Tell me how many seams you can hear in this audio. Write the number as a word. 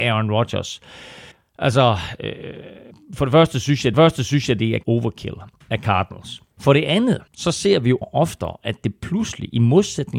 seven